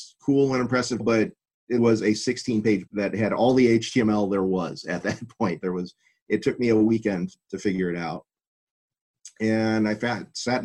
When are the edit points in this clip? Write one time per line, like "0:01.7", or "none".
0:01.0
0:01.8
0:02.9

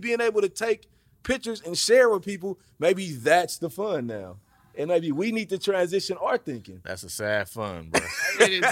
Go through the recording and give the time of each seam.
none

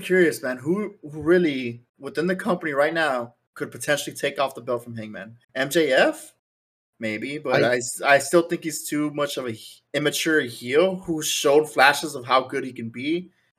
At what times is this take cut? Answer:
0:01.9
0:05.4
0:09.9

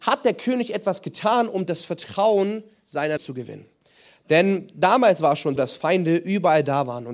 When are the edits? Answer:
0:03.2
0:05.6

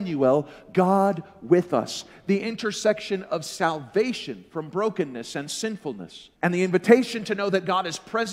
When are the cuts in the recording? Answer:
0:06.4

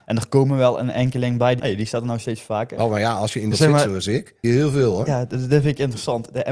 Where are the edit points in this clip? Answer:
0:01.6
0:03.5
0:04.4

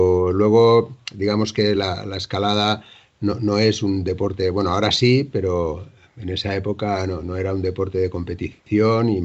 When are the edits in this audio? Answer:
none

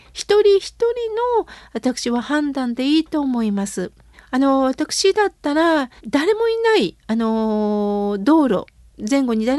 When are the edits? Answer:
0:04.1
0:06.0

